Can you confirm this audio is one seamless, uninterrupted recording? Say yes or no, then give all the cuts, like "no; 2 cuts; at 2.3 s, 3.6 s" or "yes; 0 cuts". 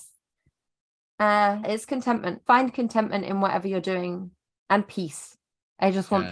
no; 2 cuts; at 1.6 s, 2.5 s